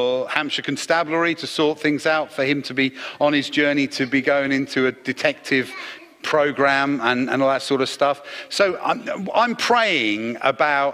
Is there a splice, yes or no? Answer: no